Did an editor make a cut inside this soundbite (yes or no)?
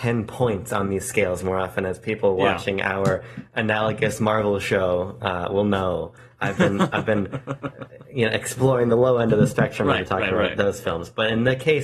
no